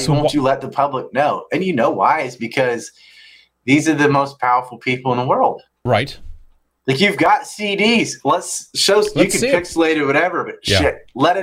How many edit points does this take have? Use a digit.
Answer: 0